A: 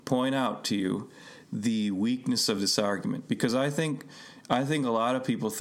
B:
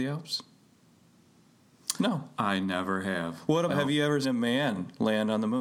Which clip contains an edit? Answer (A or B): B